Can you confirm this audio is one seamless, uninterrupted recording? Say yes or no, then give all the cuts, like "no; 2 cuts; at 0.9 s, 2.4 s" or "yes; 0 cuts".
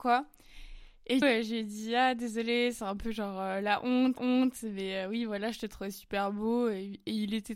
no; 2 cuts; at 1.2 s, 4.2 s